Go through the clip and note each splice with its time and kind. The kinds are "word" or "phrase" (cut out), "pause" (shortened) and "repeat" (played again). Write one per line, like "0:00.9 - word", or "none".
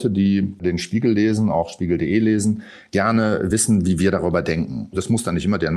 none